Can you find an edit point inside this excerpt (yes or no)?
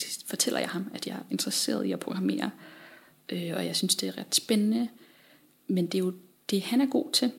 no